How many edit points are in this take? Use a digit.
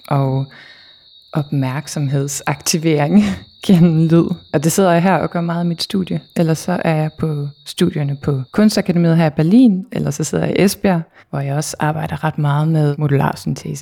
2